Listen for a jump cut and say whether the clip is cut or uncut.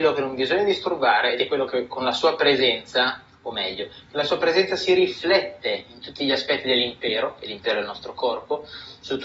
uncut